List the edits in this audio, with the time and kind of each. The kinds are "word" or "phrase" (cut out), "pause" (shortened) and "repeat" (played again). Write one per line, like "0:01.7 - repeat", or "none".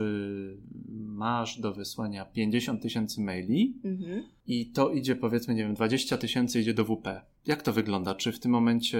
none